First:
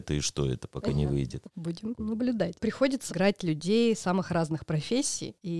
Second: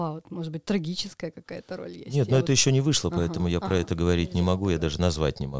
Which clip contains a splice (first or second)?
first